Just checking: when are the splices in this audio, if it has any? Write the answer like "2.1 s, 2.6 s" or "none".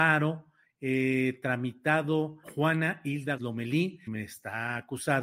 2.4 s, 3.4 s, 4.1 s